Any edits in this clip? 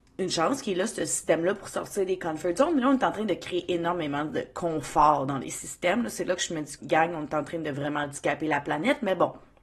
yes; 1 cut; at 6.8 s

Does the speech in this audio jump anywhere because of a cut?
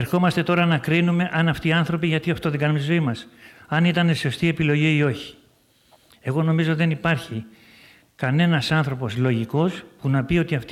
no; 0 cuts

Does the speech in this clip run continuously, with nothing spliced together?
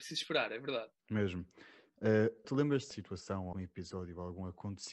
no; 4 cuts; at 1.0 s, 2.4 s, 2.9 s, 3.5 s

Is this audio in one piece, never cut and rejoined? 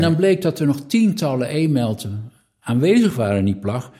yes; 0 cuts

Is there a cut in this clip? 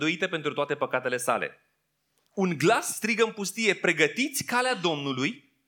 no; 0 cuts

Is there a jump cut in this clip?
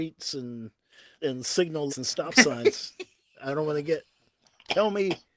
yes; 2 cuts; at 1.2 s, 1.9 s

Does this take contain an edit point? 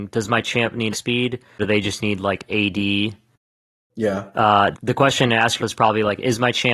yes; 4 cuts; at 0.9 s, 1.6 s, 4.7 s, 5.6 s

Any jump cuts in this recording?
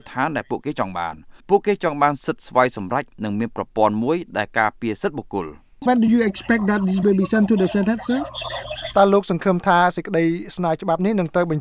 yes; 3 cuts; at 1.4 s, 5.9 s, 7.0 s

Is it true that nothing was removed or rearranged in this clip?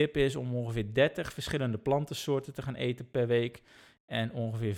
yes; 0 cuts

